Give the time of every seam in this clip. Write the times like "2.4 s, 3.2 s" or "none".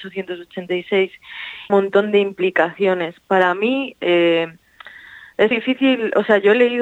1.7 s, 5.5 s